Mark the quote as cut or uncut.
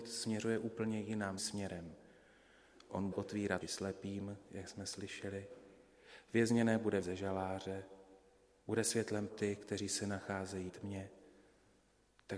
cut